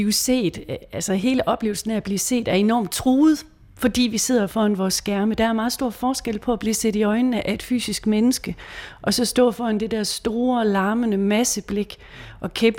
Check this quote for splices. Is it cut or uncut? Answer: uncut